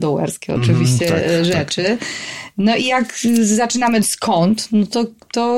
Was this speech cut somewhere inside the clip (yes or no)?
yes